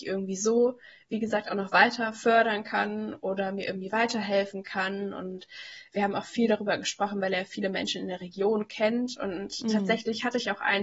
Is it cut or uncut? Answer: uncut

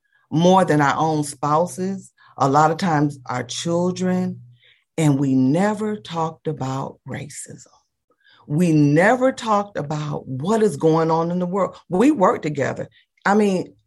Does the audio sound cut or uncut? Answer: uncut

